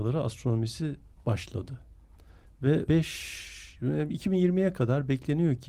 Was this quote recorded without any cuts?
no; 1 cut; at 2.9 s

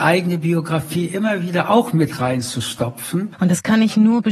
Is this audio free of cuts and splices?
yes; 0 cuts

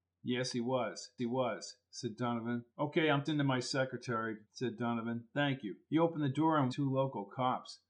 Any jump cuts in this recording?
yes; 6 cuts; at 1.2 s, 2.7 s, 3.3 s, 4.4 s, 5.8 s, 6.7 s

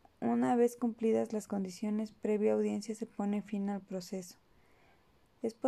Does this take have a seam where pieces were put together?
no; 0 cuts

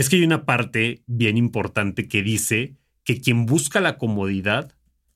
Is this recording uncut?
yes; 0 cuts

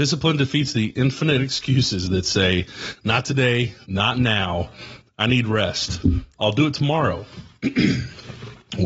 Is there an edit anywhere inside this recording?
yes; 1 cut; at 3.8 s

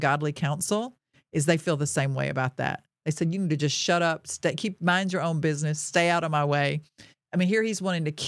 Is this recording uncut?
yes; 0 cuts

